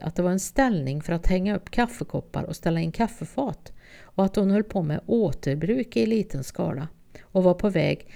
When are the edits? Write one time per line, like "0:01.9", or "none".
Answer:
none